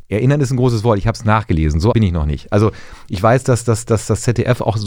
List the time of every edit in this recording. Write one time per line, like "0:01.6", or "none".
0:01.9